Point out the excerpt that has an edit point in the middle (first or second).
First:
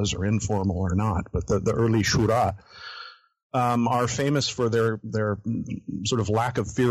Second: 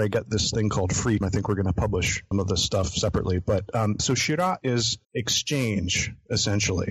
second